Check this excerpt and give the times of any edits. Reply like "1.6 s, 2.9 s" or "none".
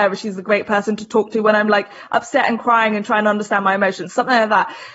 none